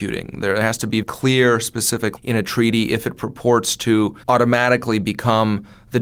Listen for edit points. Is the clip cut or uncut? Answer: cut